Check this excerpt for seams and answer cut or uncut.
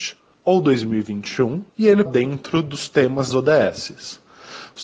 cut